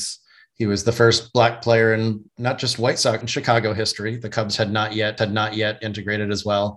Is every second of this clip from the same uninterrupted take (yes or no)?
no